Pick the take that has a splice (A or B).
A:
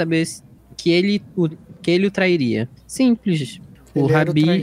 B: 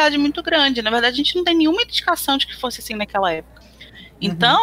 A